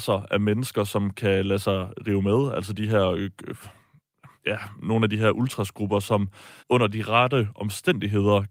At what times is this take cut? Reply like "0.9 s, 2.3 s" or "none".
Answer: 4.4 s, 6.6 s